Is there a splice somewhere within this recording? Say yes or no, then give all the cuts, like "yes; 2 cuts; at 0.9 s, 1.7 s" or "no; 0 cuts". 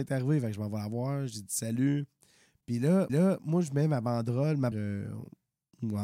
yes; 2 cuts; at 3.1 s, 4.7 s